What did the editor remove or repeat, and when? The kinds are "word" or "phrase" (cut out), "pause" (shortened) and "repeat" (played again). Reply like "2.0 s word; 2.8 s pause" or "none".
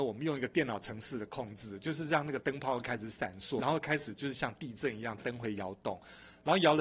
3.6 s word